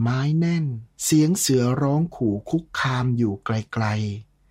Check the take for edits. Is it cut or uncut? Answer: cut